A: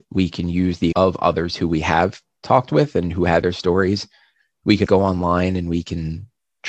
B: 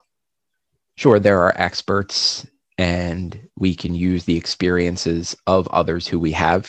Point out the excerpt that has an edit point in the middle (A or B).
A